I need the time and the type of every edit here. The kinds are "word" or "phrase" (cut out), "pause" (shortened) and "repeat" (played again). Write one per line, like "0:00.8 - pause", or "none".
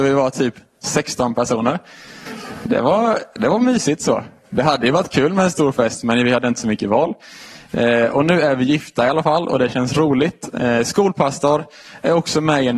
none

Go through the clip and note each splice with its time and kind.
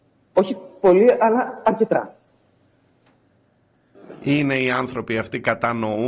none

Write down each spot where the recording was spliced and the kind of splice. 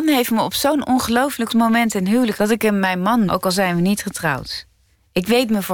0:01.5 - word
0:02.3 - word
0:03.3 - word

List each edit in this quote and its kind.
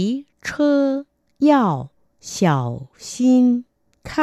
none

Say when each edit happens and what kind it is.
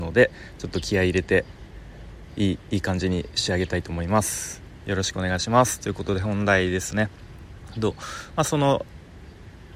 none

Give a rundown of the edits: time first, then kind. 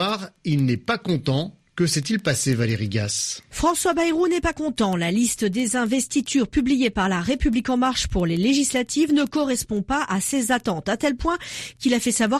none

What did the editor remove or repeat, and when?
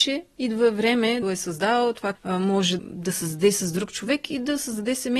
0:01.2 - phrase
0:02.1 - word
0:02.8 - word

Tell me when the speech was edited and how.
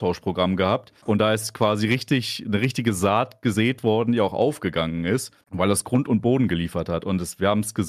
0:01.0 - pause
0:05.4 - pause

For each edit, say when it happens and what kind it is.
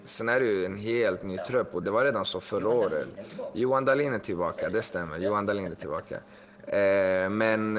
0:01.8 - word

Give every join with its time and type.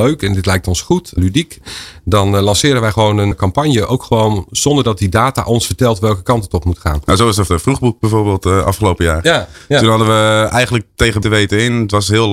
0:03.3 - word
0:07.5 - word
0:11.2 - word

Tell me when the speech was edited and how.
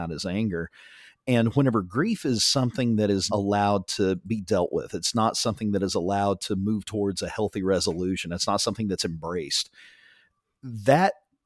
0:03.3 - word

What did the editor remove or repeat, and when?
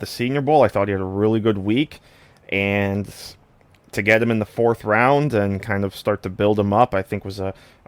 none

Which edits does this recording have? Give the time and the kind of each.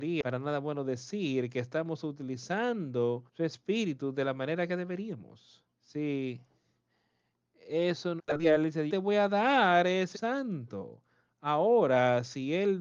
0:03.3 - pause
0:05.7 - pause
0:08.2 - word
0:08.9 - word
0:10.1 - word

